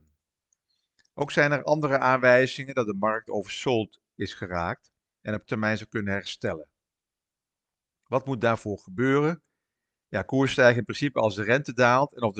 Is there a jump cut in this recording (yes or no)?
yes